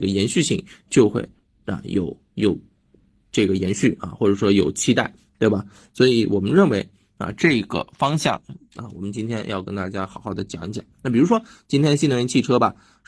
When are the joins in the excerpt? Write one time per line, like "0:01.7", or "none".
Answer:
none